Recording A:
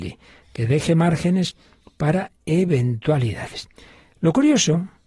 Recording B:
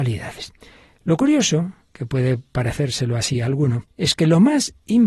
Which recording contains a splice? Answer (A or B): B